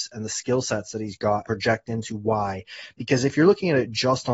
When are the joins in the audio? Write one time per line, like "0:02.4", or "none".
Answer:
0:01.4